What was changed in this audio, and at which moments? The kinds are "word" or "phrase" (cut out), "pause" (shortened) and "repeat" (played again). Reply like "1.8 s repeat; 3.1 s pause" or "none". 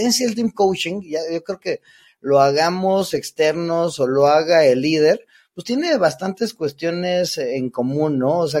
none